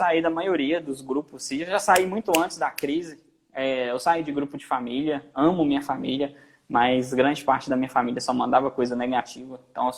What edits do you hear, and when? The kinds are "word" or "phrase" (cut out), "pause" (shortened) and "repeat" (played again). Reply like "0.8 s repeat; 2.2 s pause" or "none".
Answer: none